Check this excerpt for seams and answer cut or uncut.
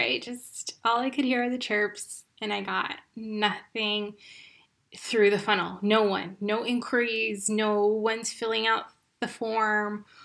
uncut